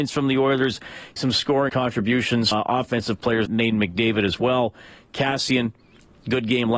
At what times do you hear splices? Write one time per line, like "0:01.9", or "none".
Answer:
0:01.2
0:01.7
0:02.5
0:03.5

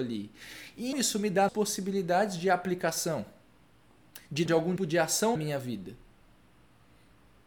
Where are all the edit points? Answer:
0:00.9
0:01.5
0:04.5
0:04.8
0:05.4

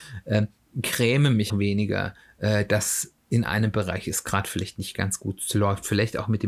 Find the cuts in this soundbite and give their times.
0:01.5

